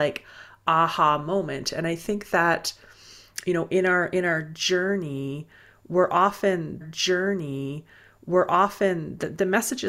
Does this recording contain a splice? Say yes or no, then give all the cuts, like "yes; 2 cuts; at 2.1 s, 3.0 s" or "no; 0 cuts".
yes; 1 cut; at 6.8 s